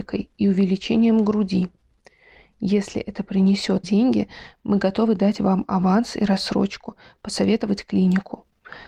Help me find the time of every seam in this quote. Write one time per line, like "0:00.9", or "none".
0:03.8